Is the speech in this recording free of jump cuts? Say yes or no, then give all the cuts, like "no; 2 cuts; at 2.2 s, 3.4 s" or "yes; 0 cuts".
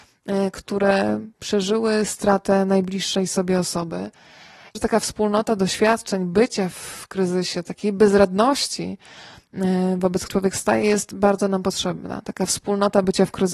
no; 2 cuts; at 4.7 s, 10.3 s